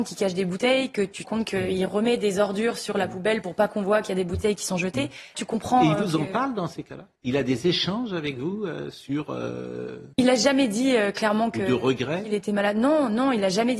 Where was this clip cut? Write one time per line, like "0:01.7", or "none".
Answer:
0:01.2
0:05.3
0:07.1
0:10.1